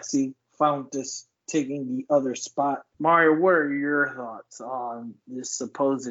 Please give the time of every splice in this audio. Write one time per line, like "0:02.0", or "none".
0:02.9